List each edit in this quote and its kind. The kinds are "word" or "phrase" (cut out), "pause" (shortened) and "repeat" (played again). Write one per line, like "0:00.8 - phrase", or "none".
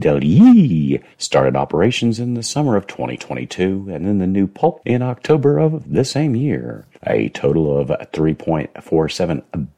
0:01.1 - pause
0:04.8 - phrase
0:06.9 - pause

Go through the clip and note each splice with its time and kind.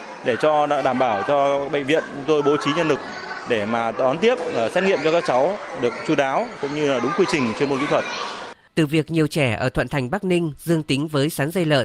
none

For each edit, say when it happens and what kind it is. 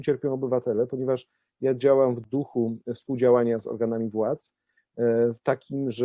none

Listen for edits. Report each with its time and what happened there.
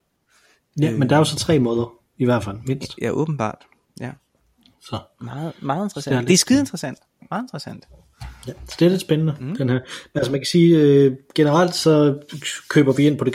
none

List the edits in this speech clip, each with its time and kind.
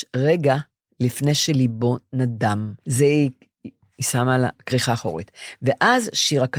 0:02.8 - pause

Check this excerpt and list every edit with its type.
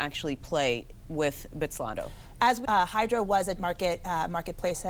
0:02.6 - word
0:03.6 - word

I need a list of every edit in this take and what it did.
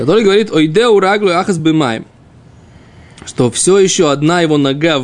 none

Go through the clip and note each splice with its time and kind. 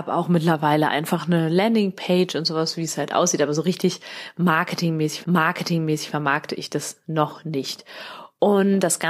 0:05.2 - repeat

